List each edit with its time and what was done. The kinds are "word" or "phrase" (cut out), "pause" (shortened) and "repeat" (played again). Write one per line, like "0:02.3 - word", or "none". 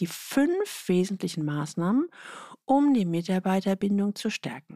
none